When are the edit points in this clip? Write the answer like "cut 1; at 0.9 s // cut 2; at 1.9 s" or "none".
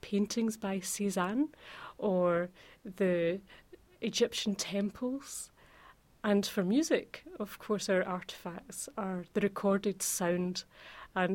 none